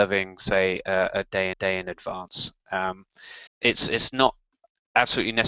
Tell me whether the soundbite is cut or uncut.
cut